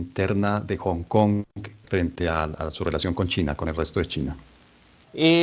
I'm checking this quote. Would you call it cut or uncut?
uncut